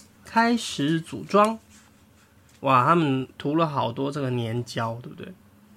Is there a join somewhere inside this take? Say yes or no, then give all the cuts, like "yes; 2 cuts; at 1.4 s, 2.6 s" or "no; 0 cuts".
yes; 1 cut; at 3.3 s